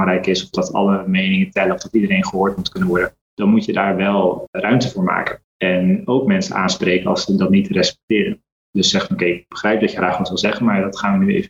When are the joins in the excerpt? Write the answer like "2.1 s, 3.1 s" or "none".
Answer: none